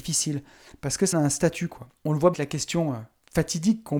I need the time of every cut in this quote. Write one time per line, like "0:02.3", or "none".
0:01.1
0:02.0
0:02.3